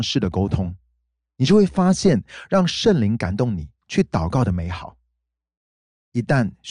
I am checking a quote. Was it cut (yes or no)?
no